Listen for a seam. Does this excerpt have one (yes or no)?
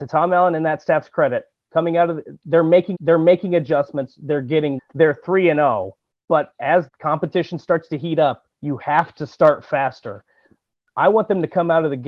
yes